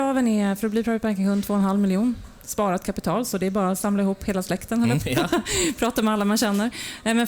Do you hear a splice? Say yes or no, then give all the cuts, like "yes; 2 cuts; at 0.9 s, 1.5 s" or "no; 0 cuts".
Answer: yes; 1 cut; at 5.0 s